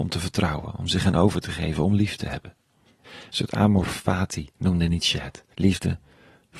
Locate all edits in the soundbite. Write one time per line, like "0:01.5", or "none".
0:03.0
0:04.5
0:05.5